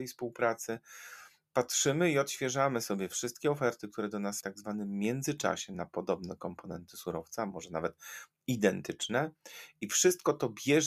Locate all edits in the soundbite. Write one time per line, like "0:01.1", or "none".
0:04.4